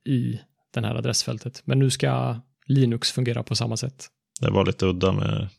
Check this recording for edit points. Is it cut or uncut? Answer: uncut